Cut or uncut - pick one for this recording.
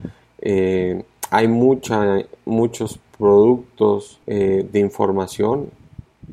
cut